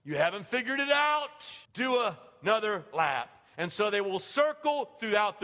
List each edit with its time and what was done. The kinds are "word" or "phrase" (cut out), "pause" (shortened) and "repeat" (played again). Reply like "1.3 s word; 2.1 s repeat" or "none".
1.6 s pause